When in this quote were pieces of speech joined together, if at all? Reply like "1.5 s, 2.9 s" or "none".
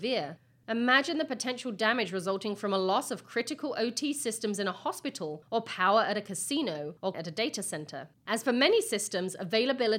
7.1 s, 8.2 s